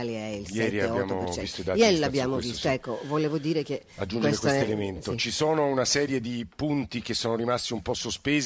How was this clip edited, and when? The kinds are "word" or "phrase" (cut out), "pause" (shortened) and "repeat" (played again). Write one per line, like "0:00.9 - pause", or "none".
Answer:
none